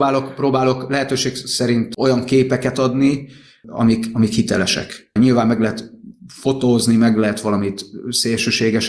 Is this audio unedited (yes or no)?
yes